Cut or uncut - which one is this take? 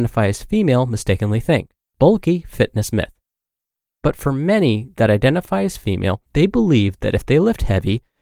cut